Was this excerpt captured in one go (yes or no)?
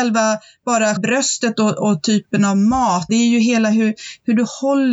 no